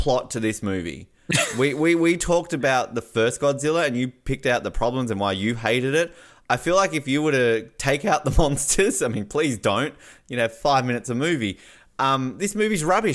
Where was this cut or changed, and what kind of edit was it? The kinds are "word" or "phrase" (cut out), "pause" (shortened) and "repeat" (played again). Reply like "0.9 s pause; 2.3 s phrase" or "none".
none